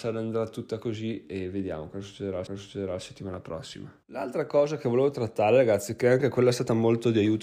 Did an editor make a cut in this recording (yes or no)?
yes